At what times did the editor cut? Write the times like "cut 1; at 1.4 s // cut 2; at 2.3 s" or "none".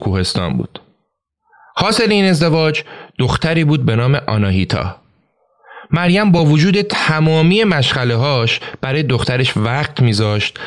none